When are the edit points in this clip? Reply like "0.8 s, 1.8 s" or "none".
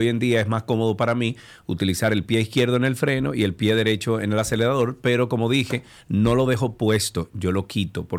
none